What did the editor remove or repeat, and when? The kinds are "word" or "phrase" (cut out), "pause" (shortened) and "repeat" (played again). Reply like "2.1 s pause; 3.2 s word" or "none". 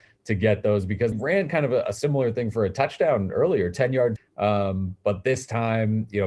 1.1 s word; 4.2 s word

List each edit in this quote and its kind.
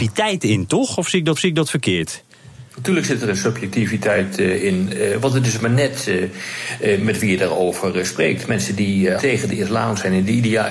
1.4 s repeat; 9.2 s word

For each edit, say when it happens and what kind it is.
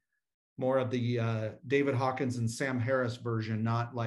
none

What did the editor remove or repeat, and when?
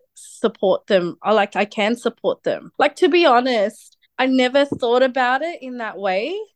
2.7 s pause; 4.0 s pause

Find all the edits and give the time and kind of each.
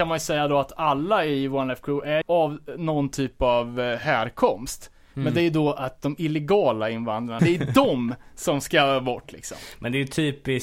2.2 s word; 7.4 s word

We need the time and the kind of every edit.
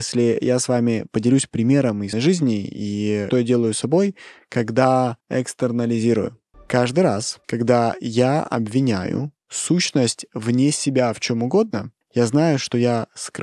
2.1 s word; 3.3 s word; 5.2 s pause; 7.4 s pause; 12.0 s pause

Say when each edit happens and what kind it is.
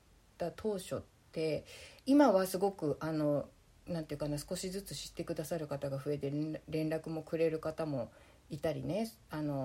2.0 s pause

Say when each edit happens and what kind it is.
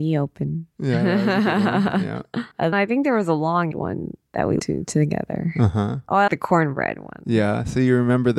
2.7 s word; 3.7 s word; 4.6 s word; 6.3 s word

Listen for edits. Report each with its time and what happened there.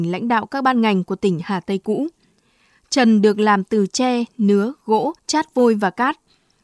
5.2 s pause

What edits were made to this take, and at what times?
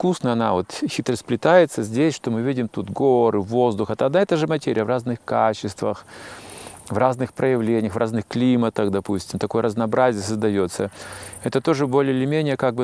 none

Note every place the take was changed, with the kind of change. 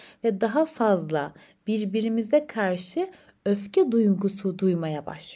none

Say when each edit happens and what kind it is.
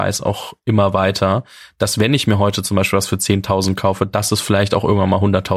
none

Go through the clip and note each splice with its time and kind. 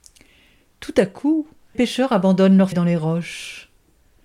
1.7 s word; 2.7 s word

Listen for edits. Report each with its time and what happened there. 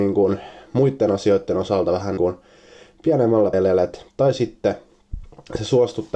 2.2 s word; 3.5 s word; 4.1 s pause

